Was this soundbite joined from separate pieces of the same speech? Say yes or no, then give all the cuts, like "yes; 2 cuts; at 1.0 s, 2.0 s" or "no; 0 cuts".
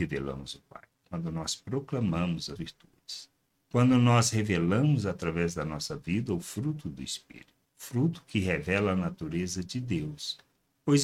yes; 2 cuts; at 2.6 s, 7.6 s